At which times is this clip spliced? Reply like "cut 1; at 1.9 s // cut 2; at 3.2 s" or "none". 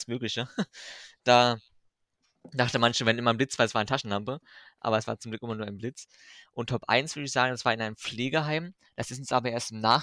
none